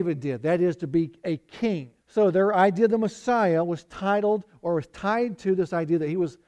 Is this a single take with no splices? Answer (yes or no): no